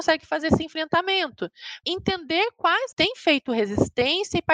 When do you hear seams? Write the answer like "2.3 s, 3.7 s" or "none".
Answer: 1.8 s, 2.9 s